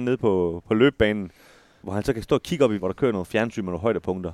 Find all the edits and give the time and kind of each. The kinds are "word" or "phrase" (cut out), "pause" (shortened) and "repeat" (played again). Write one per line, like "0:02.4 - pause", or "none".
0:01.8 - word
0:02.8 - word